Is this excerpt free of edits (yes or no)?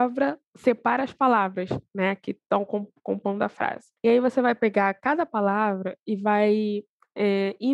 no